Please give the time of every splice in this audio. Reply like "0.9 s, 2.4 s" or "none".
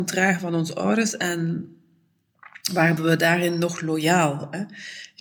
3.0 s